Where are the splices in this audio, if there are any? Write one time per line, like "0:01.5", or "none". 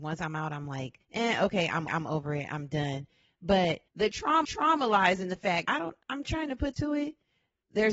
0:01.0
0:01.9
0:03.9
0:04.4
0:05.6
0:06.0
0:06.7